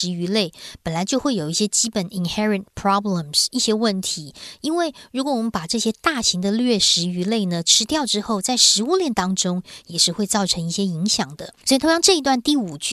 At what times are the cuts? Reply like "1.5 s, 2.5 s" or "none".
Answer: 11.6 s